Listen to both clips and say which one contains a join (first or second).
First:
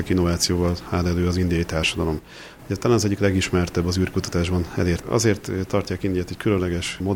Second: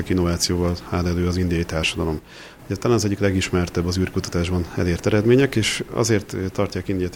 first